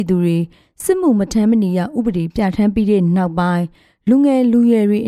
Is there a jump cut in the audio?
no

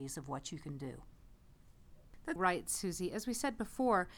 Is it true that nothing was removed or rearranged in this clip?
no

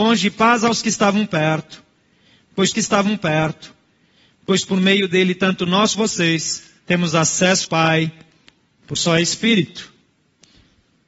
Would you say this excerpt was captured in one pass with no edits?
no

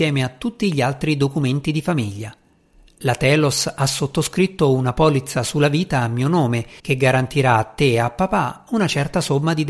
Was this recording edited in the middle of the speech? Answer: yes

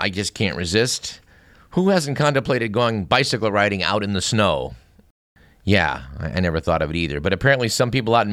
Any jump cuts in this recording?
no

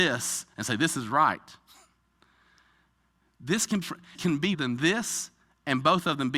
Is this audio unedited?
no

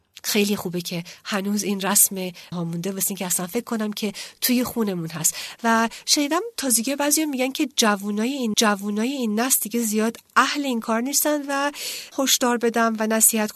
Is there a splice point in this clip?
yes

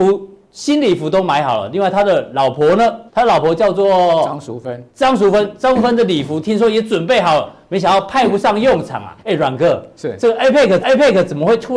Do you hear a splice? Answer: yes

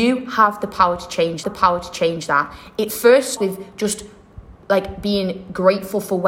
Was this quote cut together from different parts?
yes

